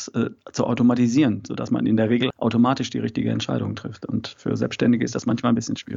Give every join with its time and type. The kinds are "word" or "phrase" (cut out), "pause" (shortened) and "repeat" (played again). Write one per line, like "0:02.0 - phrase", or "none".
0:02.3 - word